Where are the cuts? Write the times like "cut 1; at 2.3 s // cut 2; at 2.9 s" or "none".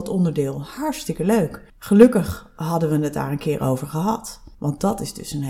cut 1; at 1.7 s // cut 2; at 4.5 s